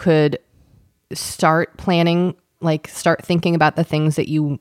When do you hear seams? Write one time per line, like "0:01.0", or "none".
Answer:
none